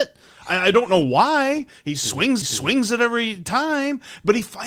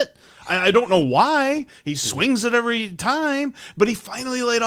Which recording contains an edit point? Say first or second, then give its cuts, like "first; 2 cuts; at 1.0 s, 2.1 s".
first; 1 cut; at 2.4 s